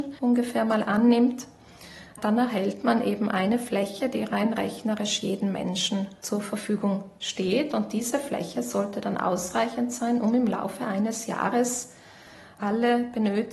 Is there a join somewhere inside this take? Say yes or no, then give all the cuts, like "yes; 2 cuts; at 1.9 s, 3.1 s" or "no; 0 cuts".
no; 0 cuts